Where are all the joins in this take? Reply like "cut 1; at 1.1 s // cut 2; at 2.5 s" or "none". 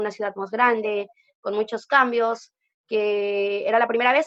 none